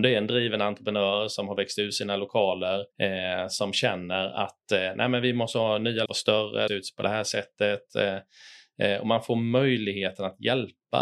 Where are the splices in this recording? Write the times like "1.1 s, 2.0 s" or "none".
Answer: 2.9 s, 6.1 s, 6.7 s